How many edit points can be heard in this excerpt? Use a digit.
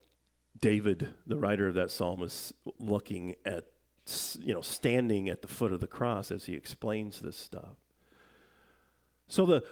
0